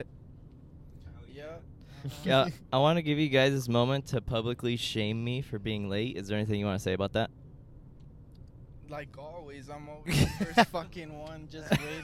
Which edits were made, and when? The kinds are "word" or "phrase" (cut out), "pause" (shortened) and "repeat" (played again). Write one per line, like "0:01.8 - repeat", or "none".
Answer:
none